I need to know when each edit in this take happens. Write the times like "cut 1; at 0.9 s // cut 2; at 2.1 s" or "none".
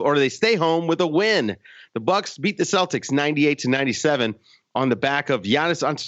none